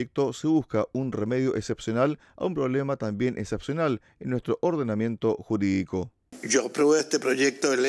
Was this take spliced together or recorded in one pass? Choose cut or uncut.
uncut